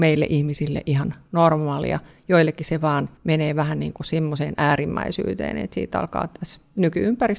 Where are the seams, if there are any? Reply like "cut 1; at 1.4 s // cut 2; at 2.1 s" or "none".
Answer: cut 1; at 3.2 s